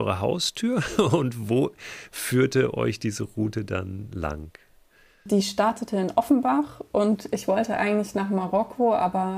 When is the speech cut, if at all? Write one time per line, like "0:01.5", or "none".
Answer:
none